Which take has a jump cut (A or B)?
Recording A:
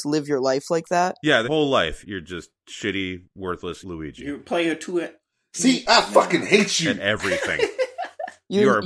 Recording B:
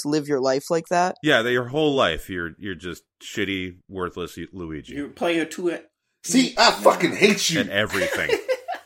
A